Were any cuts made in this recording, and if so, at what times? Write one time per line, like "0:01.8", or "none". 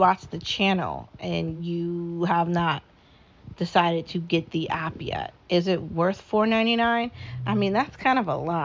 none